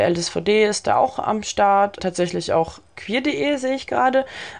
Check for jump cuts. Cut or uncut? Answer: uncut